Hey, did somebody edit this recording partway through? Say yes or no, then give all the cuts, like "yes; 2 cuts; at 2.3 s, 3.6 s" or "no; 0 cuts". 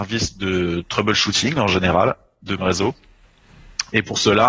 yes; 1 cut; at 2.6 s